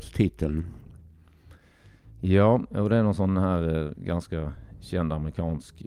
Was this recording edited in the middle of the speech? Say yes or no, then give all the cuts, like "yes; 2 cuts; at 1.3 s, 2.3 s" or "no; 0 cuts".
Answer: no; 0 cuts